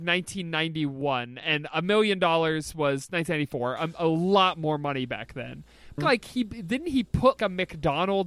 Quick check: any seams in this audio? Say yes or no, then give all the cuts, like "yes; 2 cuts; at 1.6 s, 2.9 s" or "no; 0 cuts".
yes; 2 cuts; at 6.0 s, 7.4 s